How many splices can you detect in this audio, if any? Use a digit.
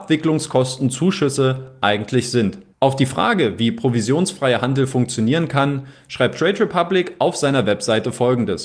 0